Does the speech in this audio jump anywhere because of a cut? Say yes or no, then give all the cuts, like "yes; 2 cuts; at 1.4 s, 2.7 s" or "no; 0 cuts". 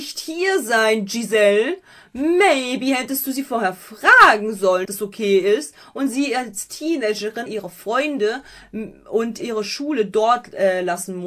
yes; 3 cuts; at 4.8 s, 7.5 s, 9.4 s